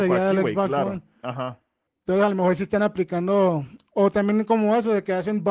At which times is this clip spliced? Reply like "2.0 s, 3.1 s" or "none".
1.9 s